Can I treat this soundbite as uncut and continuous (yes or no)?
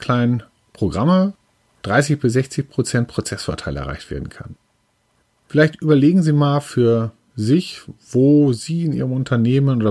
yes